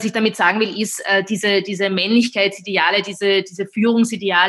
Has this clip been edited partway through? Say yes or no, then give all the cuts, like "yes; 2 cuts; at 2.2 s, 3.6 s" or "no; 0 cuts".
no; 0 cuts